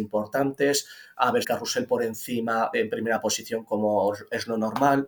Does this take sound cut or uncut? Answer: cut